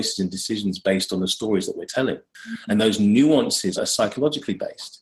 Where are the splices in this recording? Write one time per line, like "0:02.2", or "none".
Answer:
0:03.8

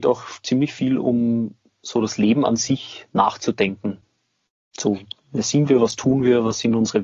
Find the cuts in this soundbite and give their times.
none

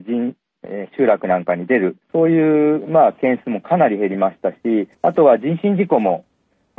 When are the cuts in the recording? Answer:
0:02.0
0:04.9

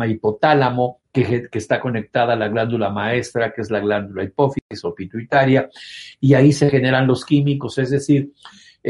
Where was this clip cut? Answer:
0:01.1

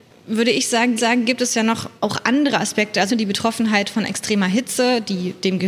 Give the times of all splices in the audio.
0:01.0
0:02.0
0:03.1

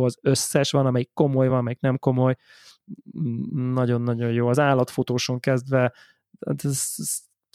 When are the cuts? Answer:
none

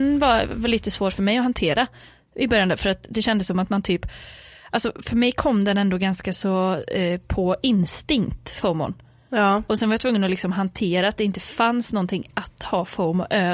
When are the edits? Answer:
none

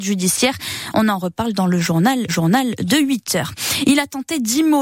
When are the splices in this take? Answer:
0:02.3

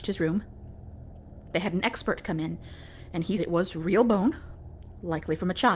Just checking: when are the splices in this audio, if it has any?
0:03.4

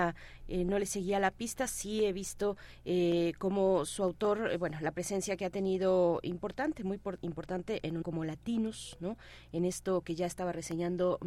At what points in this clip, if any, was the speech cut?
0:08.0

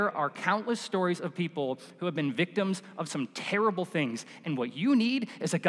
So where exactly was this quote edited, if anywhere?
none

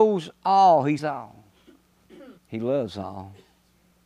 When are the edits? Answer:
0:01.0
0:02.4

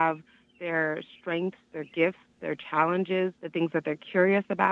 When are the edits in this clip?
0:03.4

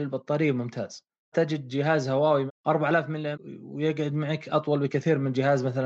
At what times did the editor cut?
0:01.3
0:02.5
0:03.3

